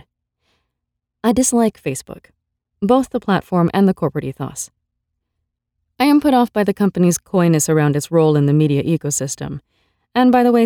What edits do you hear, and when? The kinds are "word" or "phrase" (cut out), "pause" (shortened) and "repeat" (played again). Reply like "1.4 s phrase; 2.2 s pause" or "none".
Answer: none